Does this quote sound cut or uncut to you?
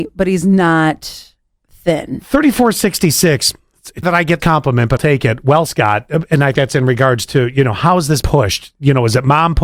cut